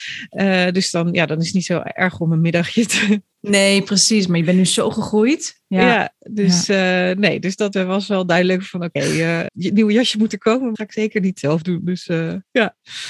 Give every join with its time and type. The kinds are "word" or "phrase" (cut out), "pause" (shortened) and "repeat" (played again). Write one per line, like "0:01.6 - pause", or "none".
0:07.7 - word
0:09.5 - word
0:10.7 - phrase